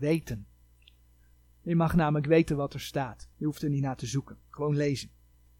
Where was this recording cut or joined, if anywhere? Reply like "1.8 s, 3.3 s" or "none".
3.3 s